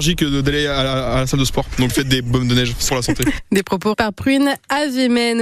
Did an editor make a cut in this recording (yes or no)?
yes